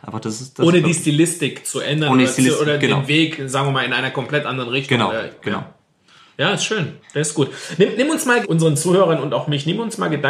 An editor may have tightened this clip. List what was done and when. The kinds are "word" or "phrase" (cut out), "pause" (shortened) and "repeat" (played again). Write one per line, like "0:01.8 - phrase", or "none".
0:08.4 - word